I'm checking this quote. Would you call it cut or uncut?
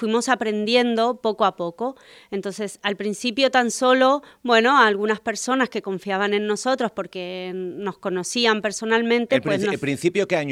uncut